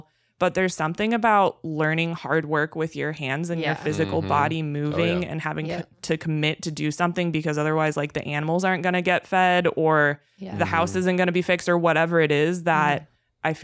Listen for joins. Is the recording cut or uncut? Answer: uncut